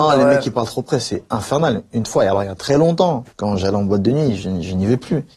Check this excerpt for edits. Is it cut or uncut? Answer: cut